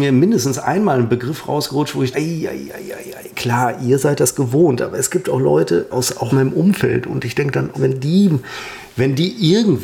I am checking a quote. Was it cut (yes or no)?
yes